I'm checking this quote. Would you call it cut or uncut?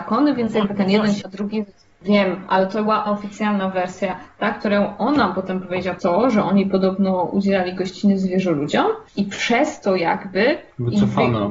cut